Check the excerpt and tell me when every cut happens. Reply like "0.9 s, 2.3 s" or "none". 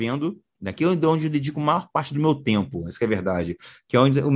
none